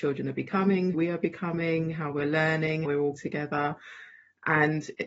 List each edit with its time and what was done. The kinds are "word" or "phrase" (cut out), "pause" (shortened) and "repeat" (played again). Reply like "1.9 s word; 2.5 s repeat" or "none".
0.9 s word; 2.8 s word; 3.1 s word